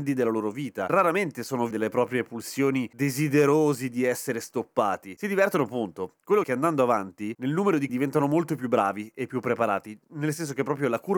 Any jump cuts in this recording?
yes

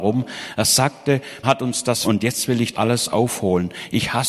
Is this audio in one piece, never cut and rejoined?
no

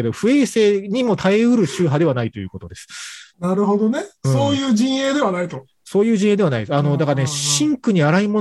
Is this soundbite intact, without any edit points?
no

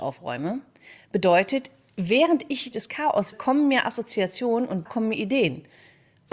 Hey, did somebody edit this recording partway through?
yes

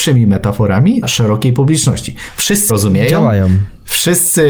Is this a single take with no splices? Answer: no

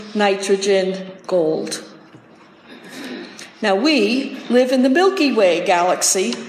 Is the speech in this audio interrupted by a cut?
yes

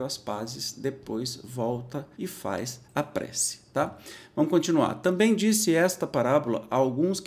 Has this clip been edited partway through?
yes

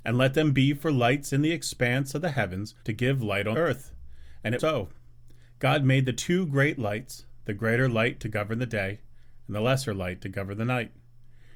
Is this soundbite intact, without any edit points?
no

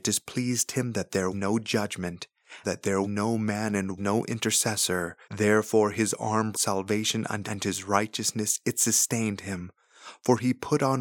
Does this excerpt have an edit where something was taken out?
yes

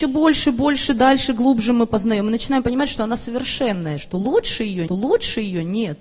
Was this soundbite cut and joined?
yes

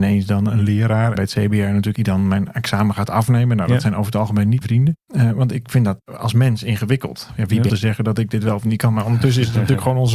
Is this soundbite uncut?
no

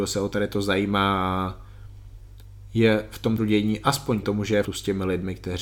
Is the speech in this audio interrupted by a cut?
yes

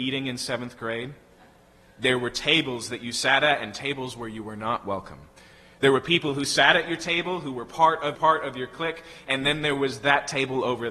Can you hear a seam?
yes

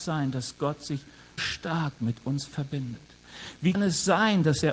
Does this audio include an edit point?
yes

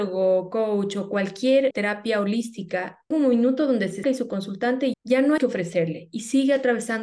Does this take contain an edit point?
yes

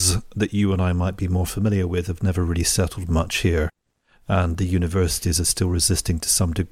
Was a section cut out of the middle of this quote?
no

